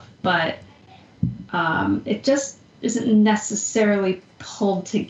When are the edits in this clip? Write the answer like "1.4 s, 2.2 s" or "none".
none